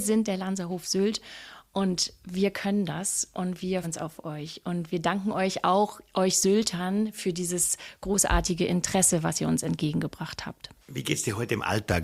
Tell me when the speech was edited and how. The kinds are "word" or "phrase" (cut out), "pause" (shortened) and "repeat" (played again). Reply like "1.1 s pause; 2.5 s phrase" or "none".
3.8 s word; 10.8 s pause